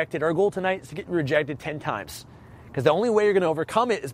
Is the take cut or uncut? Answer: uncut